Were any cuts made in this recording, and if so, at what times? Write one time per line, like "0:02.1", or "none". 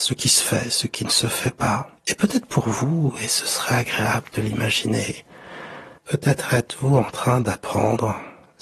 0:02.0
0:06.0

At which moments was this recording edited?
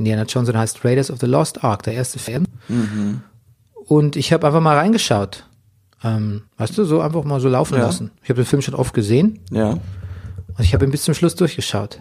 0:06.5
0:08.2

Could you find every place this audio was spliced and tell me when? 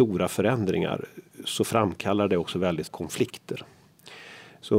0:02.9

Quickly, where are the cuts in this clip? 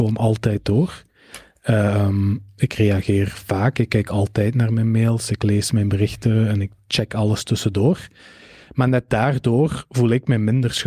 none

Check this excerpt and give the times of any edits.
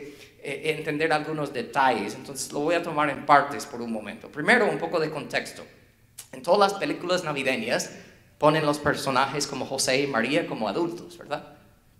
none

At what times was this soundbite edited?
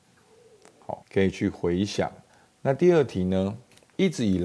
0:01.0
0:02.3

